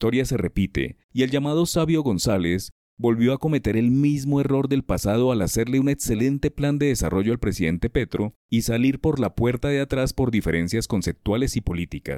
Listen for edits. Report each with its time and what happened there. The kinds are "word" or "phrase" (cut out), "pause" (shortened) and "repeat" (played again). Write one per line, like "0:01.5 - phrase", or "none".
0:01.0 - pause
0:08.4 - pause